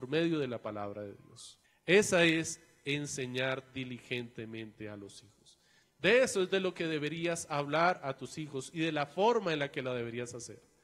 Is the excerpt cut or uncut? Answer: cut